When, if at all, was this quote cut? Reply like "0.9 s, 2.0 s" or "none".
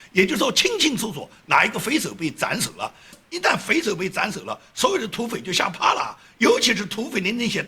none